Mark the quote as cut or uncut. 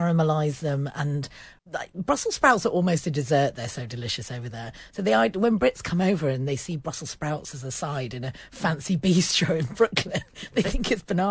cut